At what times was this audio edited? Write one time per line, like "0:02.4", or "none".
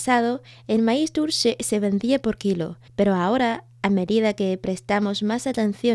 0:02.9

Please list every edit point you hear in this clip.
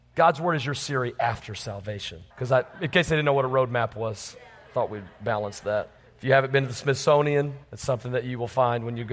0:02.3
0:04.6
0:06.0
0:07.6

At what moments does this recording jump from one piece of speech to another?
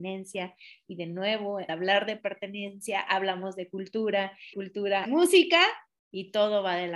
0:01.7
0:04.5
0:05.1

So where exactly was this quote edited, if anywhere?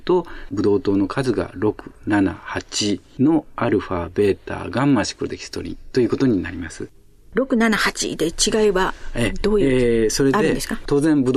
none

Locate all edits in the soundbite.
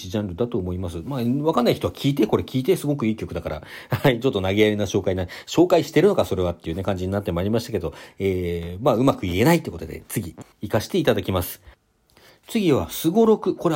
0:10.5

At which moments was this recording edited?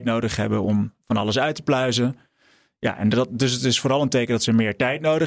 none

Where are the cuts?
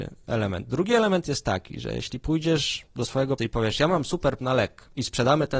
0:03.4
0:04.4

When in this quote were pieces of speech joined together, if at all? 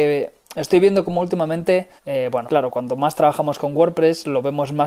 0:02.0
0:02.4

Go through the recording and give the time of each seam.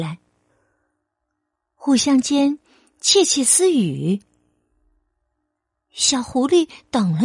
none

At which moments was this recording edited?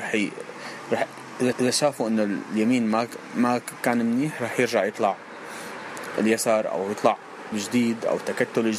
0:01.5
0:07.5

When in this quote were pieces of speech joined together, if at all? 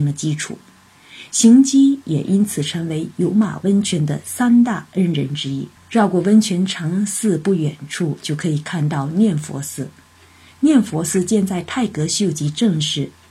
0:05.8

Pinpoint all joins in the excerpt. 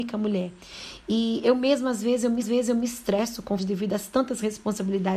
0:02.4
0:03.6

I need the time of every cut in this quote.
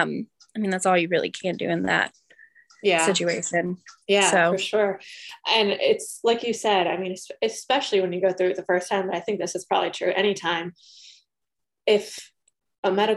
none

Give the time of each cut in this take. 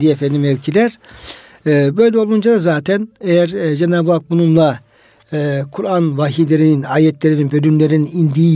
none

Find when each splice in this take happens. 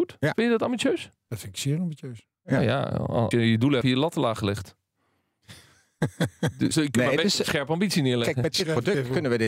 0:01.2
0:03.3
0:03.8
0:06.7

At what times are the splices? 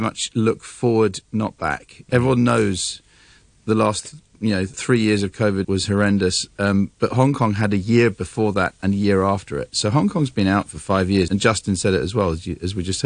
0:04.7
0:05.6
0:11.3

